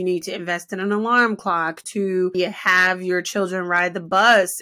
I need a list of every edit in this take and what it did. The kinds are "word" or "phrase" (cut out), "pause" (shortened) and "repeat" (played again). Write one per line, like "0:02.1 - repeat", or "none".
0:01.8 - phrase
0:02.3 - word